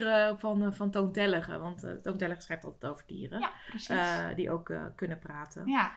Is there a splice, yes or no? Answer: no